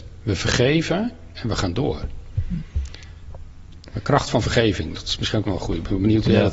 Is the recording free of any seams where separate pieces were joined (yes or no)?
yes